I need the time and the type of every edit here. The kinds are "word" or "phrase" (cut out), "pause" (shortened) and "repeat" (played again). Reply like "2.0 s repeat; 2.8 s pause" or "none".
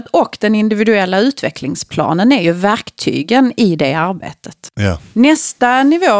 5.1 s pause